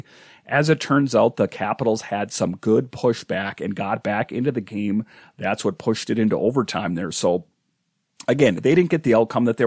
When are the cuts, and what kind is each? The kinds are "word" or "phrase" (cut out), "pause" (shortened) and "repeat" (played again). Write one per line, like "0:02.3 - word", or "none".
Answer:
none